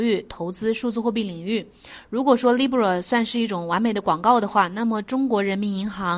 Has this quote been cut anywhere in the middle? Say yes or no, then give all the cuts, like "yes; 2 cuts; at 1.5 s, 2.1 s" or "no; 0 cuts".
no; 0 cuts